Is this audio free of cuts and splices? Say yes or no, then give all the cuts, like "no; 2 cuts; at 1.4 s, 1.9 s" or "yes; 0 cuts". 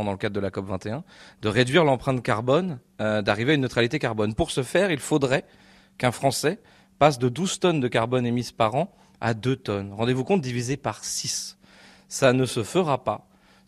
yes; 0 cuts